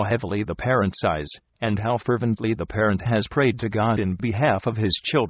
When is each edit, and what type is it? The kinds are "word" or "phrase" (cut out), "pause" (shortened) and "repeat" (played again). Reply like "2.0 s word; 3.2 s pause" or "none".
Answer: none